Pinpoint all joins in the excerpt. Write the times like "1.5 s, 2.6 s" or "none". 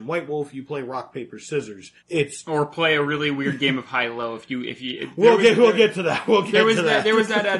2.0 s